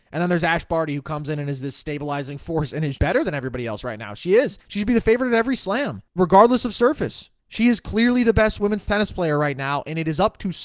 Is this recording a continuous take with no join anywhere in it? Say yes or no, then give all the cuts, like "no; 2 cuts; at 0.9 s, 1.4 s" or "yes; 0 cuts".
no; 4 cuts; at 3.0 s, 4.6 s, 6.1 s, 7.4 s